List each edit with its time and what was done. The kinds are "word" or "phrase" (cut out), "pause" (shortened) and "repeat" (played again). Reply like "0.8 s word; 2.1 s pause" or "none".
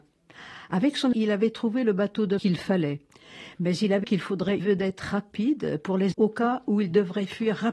1.1 s word; 2.4 s word; 4.0 s word; 4.6 s word; 6.1 s word